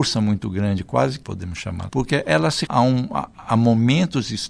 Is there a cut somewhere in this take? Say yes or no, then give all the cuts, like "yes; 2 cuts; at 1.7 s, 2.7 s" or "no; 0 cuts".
yes; 3 cuts; at 1.2 s, 1.9 s, 2.7 s